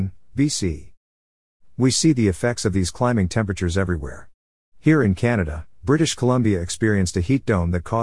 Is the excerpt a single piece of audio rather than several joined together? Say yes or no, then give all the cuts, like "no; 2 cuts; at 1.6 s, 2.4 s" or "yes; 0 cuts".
yes; 0 cuts